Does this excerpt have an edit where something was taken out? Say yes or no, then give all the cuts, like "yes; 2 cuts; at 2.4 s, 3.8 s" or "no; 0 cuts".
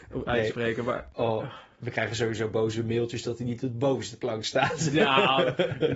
no; 0 cuts